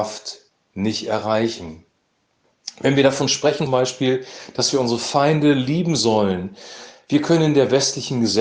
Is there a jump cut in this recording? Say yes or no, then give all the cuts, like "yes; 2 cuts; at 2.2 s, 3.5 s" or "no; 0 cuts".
yes; 1 cut; at 3.7 s